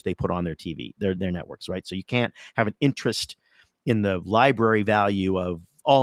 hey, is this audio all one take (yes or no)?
yes